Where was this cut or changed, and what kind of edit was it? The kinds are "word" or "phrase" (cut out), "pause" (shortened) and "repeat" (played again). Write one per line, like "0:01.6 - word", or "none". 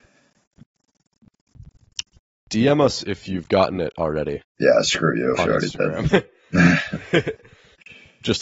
0:04.5 - pause